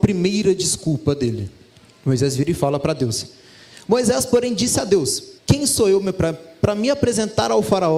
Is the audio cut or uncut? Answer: cut